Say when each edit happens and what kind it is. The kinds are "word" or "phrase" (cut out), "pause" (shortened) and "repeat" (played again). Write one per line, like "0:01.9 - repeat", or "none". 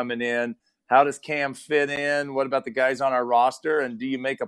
none